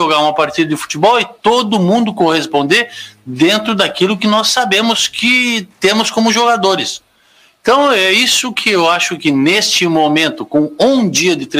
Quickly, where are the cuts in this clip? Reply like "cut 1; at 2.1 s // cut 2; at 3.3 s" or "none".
none